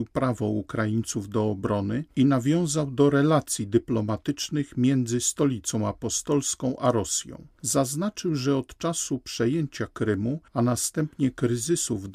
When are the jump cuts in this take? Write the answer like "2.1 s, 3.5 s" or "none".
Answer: 10.5 s